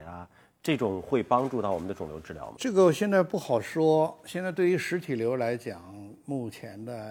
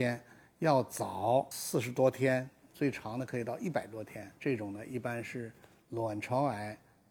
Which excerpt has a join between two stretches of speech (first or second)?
second